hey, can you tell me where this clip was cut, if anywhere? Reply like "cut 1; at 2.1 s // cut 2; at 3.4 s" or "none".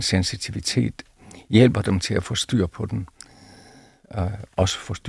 none